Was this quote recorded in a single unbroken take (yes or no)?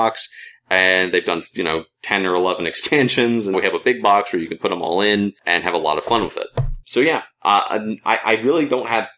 no